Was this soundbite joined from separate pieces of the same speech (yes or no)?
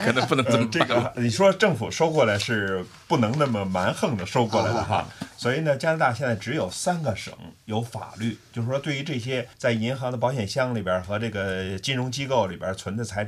yes